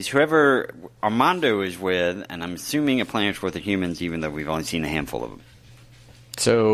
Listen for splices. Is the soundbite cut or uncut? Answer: uncut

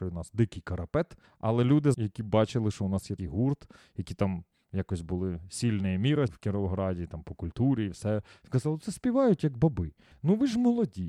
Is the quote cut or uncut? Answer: cut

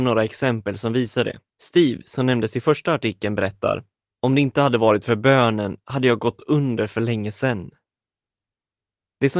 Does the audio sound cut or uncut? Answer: cut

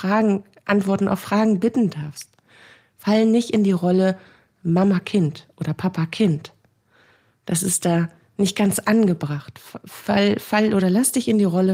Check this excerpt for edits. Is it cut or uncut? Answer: uncut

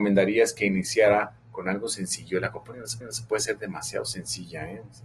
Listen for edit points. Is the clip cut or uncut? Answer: cut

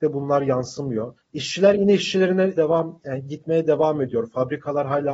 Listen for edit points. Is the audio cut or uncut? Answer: cut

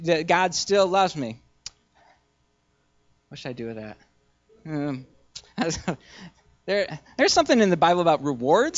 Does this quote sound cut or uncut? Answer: uncut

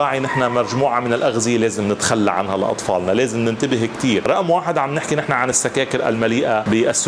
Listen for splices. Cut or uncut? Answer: uncut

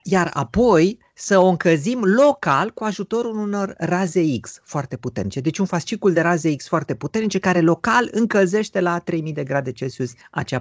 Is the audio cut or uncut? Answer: uncut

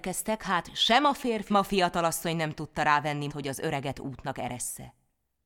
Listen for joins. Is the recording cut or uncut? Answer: cut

